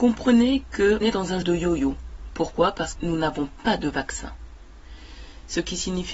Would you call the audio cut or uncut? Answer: cut